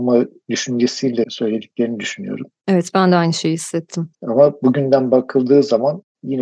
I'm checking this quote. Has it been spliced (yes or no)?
yes